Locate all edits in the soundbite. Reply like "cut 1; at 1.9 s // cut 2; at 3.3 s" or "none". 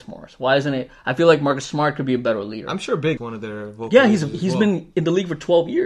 cut 1; at 3.2 s